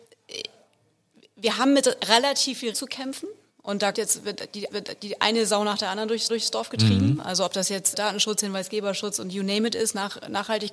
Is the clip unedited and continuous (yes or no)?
no